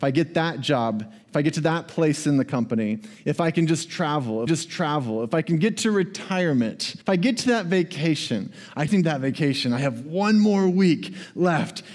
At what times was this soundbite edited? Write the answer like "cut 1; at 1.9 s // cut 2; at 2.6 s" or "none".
cut 1; at 4.5 s // cut 2; at 7.0 s // cut 3; at 8.9 s

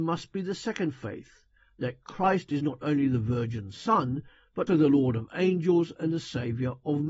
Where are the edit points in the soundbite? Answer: cut 1; at 4.7 s

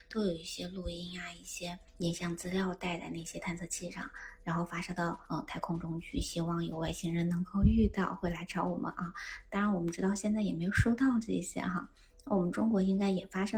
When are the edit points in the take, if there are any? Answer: cut 1; at 1.9 s

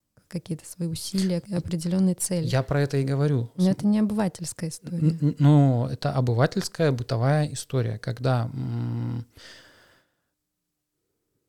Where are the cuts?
cut 1; at 1.4 s

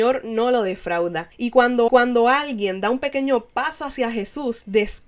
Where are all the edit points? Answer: cut 1; at 1.3 s // cut 2; at 1.9 s

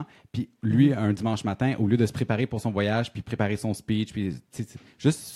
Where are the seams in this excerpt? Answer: none

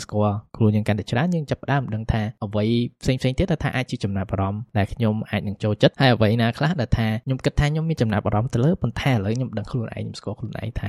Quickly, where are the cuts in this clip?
none

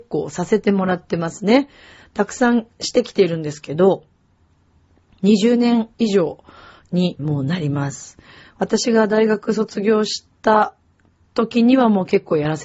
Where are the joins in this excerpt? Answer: cut 1; at 5.9 s // cut 2; at 7.2 s // cut 3; at 10.3 s

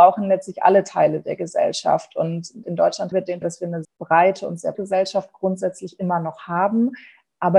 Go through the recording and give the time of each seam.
cut 1; at 2.6 s // cut 2; at 3.1 s // cut 3; at 3.4 s // cut 4; at 3.8 s // cut 5; at 4.7 s

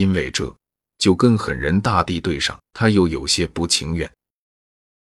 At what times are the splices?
cut 1; at 2.7 s

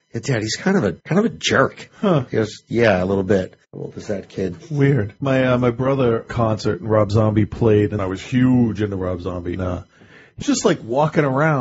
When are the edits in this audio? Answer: cut 1; at 1.0 s // cut 2; at 3.6 s // cut 3; at 5.2 s // cut 4; at 6.3 s // cut 5; at 8.0 s // cut 6; at 9.6 s // cut 7; at 10.4 s

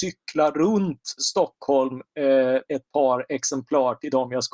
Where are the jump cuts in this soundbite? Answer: cut 1; at 1.2 s // cut 2; at 2.7 s

